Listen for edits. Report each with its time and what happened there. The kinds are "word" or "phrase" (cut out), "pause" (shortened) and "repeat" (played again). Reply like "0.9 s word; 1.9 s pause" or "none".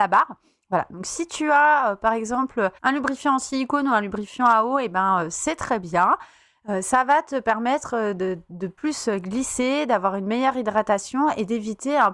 2.8 s pause; 8.8 s pause